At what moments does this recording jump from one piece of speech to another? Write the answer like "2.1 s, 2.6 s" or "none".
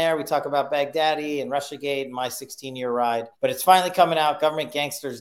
3.3 s